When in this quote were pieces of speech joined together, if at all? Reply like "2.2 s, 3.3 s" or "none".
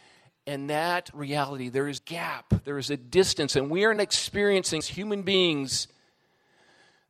1.1 s, 2.0 s, 4.0 s, 4.8 s